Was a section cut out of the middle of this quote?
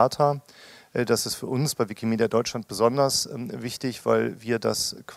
no; 0 cuts

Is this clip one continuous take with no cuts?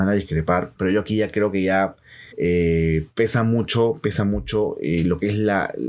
no; 1 cut; at 2.3 s

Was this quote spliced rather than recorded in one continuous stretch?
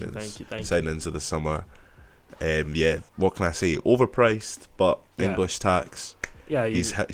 yes; 1 cut; at 3.1 s

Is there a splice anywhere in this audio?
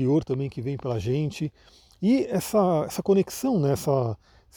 no; 0 cuts

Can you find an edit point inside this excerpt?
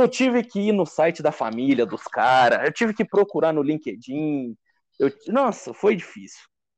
no; 0 cuts

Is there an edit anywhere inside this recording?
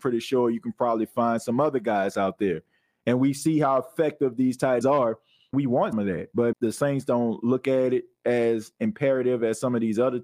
yes; 4 cuts; at 4.8 s, 5.5 s, 5.9 s, 6.5 s

